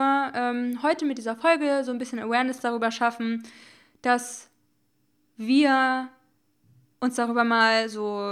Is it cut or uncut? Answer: uncut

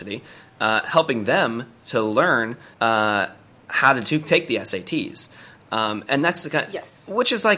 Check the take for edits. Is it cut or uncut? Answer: cut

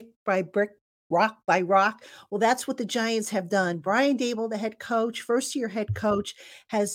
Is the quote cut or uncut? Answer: uncut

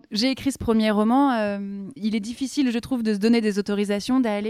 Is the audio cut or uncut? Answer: uncut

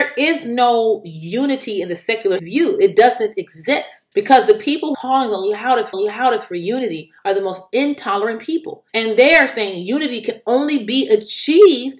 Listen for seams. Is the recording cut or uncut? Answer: cut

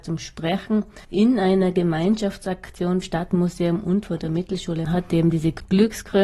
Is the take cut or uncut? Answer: cut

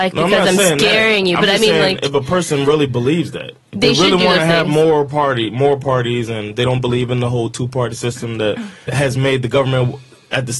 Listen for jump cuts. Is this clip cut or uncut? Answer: cut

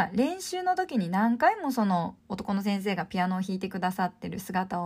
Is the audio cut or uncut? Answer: cut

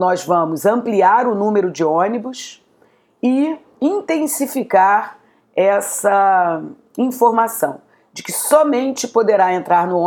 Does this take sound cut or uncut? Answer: uncut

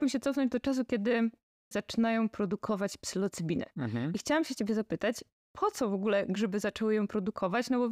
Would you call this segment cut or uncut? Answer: cut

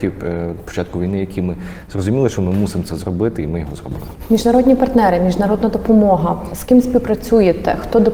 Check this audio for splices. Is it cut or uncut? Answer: uncut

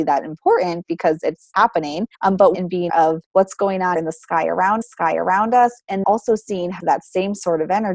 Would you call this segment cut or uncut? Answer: cut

